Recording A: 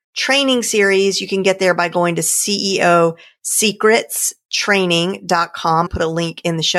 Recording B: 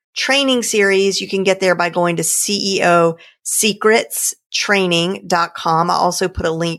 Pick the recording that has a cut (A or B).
A